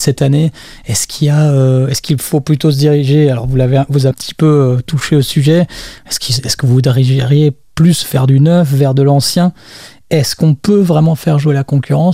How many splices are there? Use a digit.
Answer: 1